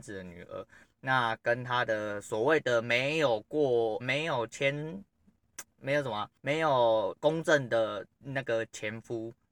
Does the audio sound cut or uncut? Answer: cut